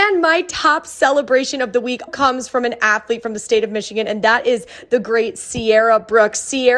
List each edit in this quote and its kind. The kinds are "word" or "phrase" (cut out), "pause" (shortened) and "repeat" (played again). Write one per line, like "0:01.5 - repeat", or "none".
0:02.1 - word

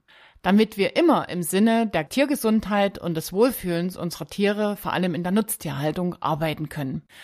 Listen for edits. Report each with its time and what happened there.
none

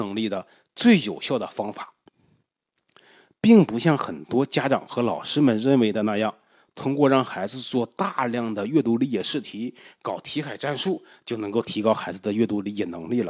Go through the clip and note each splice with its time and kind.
none

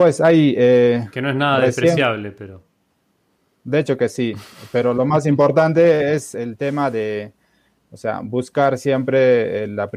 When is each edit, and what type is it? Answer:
none

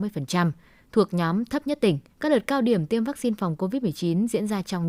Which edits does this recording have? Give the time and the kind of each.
0:02.1 - pause

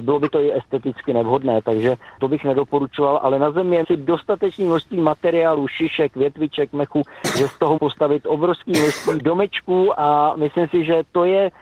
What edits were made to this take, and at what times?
0:02.2 - word
0:03.8 - word
0:07.3 - word
0:07.8 - word
0:09.2 - word

